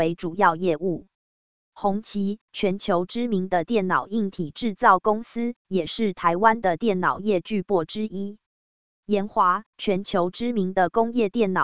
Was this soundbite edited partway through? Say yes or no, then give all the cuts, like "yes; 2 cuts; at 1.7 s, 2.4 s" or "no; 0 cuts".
no; 0 cuts